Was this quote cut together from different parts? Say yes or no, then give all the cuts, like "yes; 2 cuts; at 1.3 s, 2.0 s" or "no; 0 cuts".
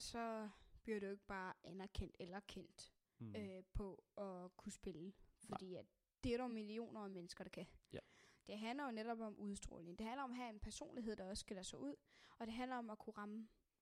no; 0 cuts